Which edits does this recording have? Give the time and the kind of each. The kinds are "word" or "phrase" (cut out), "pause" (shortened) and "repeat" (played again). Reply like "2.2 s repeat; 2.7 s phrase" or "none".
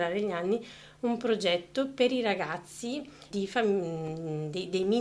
3.3 s word